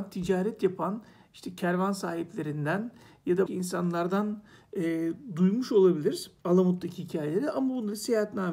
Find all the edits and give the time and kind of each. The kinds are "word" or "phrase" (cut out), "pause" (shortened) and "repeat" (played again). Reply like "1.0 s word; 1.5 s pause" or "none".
3.5 s word; 6.4 s pause